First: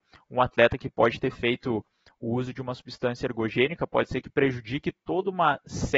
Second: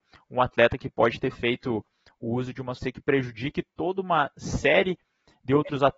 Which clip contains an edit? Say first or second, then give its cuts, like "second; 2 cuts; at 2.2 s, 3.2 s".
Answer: second; 1 cut; at 2.8 s